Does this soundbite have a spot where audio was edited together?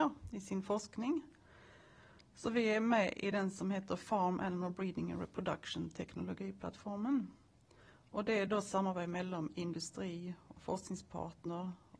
no; 0 cuts

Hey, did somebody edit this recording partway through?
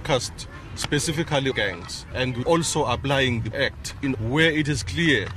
yes; 4 cuts; at 1.5 s, 2.4 s, 3.5 s, 4.1 s

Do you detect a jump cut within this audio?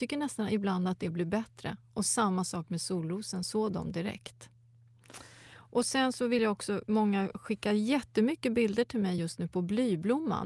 no; 0 cuts

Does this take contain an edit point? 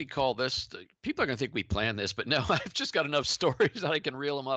no; 0 cuts

